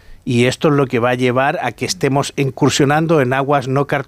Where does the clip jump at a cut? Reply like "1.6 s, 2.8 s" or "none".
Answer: none